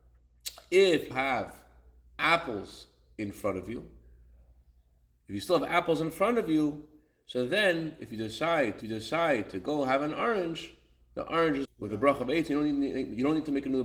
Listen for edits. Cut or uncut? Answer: cut